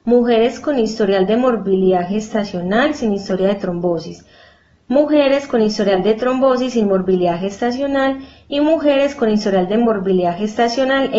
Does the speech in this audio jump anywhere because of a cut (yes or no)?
no